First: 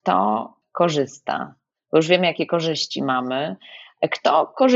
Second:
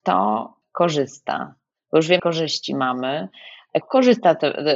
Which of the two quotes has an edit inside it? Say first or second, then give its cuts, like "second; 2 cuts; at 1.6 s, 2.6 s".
second; 2 cuts; at 2.2 s, 3.8 s